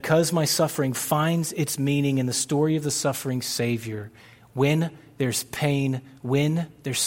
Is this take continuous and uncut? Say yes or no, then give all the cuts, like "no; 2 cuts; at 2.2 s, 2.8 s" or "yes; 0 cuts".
yes; 0 cuts